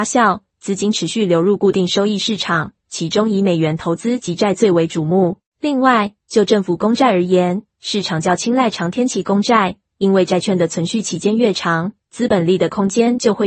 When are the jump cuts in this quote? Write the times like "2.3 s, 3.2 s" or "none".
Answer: 5.5 s

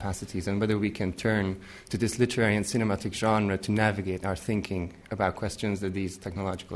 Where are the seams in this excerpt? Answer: none

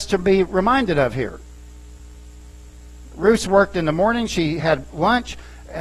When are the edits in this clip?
none

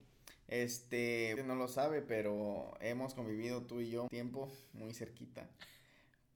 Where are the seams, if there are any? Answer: 1.4 s, 4.1 s

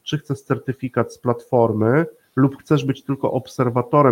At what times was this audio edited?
none

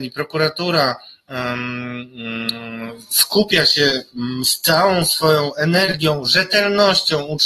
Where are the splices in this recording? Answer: none

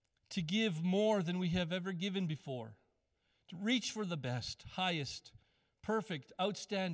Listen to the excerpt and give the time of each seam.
none

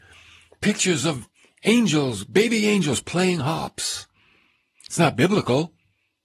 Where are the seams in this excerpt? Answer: none

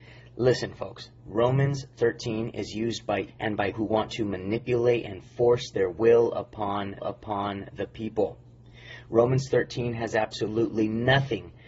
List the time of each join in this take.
1.2 s, 3.3 s, 3.7 s, 7.0 s

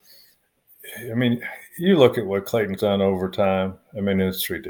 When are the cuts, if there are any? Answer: 2.8 s

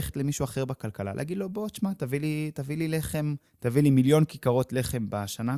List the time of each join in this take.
3.5 s

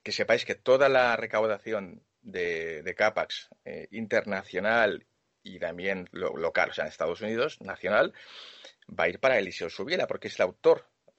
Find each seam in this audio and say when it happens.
none

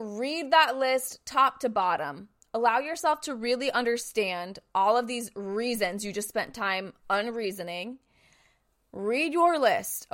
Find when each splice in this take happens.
none

